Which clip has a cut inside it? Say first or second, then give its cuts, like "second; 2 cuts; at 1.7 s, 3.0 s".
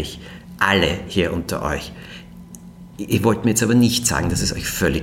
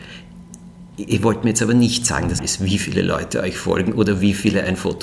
second; 1 cut; at 2.4 s